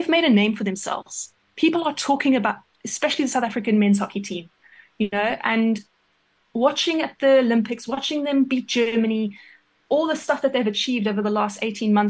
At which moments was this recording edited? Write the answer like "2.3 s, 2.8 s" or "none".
none

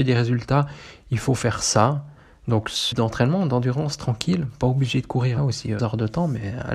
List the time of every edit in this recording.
2.9 s, 5.4 s, 5.8 s

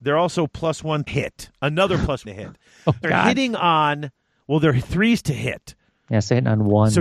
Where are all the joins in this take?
1.1 s, 2.2 s, 3.0 s

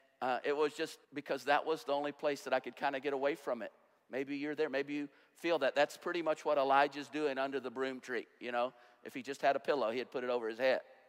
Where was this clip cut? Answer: 1.0 s

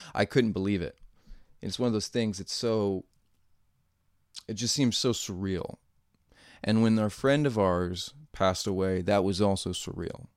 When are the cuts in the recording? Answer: none

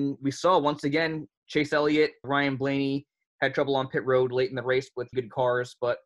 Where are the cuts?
5.1 s

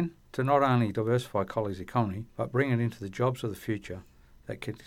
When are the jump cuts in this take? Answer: 2.3 s

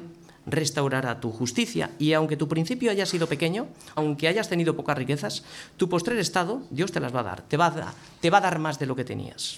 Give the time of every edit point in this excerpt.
4.0 s

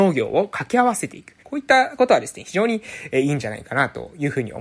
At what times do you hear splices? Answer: 1.4 s

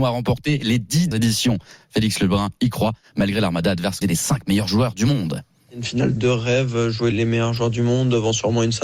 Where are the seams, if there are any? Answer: 1.1 s, 4.0 s, 6.2 s, 7.1 s

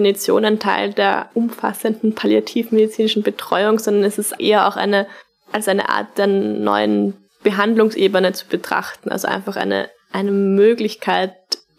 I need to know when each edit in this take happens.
4.4 s

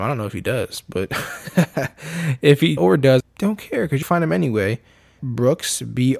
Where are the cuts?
2.8 s, 3.2 s, 4.0 s, 5.2 s

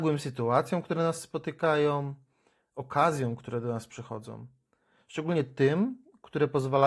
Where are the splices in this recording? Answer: none

